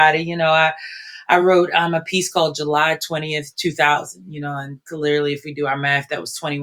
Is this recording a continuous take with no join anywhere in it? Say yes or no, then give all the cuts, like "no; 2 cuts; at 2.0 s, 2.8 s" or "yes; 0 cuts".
yes; 0 cuts